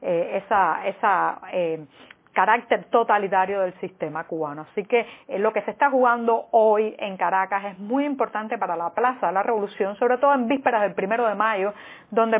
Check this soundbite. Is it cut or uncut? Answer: uncut